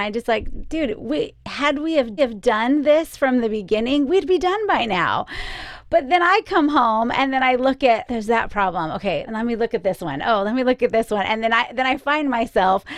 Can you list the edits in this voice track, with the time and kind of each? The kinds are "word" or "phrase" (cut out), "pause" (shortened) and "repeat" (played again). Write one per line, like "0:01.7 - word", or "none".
0:01.4 - pause
0:02.2 - repeat
0:08.1 - word
0:09.3 - word